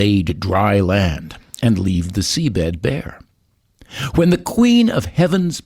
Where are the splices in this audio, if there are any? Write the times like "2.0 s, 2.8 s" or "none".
none